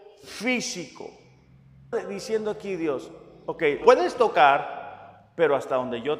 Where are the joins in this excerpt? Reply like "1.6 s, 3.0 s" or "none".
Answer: 1.9 s, 3.8 s